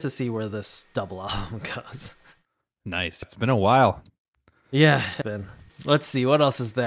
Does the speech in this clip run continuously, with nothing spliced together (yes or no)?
no